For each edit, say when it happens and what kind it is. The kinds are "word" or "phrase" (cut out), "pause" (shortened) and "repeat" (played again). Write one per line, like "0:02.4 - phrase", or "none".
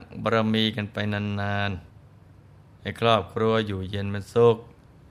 0:01.9 - pause